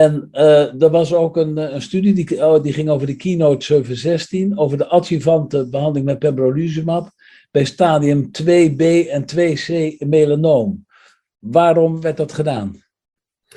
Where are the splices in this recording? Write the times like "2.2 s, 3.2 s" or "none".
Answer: none